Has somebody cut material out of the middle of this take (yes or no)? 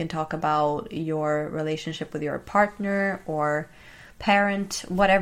no